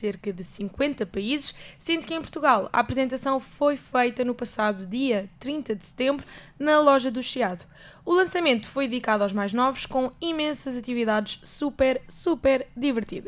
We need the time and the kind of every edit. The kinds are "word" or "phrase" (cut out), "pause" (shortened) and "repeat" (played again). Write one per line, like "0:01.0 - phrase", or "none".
none